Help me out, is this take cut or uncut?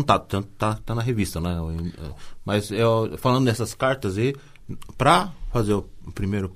uncut